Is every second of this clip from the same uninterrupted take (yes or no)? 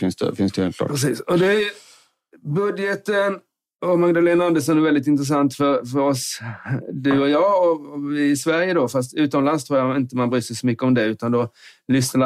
yes